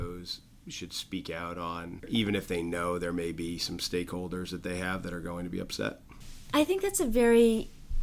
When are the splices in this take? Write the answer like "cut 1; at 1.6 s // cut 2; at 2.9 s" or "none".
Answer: none